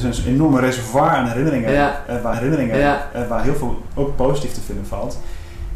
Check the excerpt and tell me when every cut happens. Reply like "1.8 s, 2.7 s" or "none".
2.3 s, 3.9 s